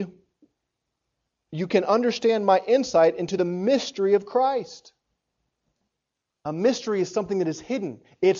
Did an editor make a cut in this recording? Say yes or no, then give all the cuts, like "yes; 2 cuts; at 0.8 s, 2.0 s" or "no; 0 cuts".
no; 0 cuts